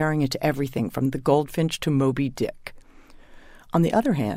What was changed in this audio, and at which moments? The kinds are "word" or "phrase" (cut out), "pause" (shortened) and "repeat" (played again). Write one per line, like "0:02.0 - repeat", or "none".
none